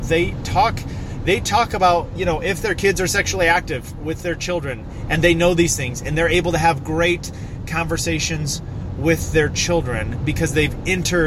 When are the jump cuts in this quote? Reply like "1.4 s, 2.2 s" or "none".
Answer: 2.2 s